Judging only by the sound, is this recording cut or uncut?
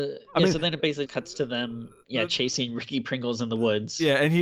cut